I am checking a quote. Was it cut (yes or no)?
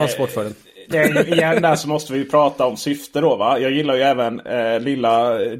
no